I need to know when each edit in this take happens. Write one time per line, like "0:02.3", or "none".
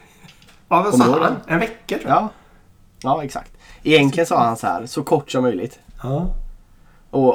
none